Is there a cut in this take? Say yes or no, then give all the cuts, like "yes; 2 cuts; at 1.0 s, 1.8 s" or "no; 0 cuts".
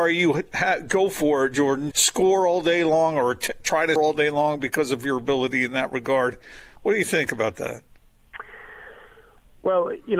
yes; 2 cuts; at 1.9 s, 4.0 s